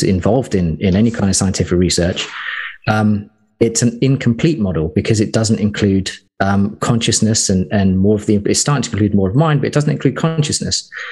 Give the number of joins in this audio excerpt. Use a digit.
1